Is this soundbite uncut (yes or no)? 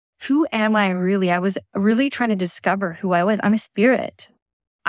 yes